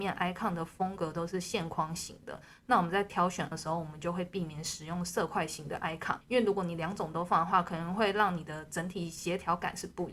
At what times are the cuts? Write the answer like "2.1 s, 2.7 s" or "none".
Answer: 3.5 s, 6.2 s